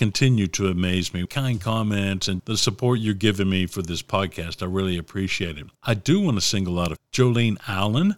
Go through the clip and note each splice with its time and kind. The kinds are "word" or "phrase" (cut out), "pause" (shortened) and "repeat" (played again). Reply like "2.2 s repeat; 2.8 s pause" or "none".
1.2 s phrase; 2.4 s word; 5.7 s pause; 7.0 s phrase